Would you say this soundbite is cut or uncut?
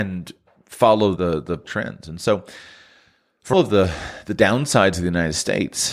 cut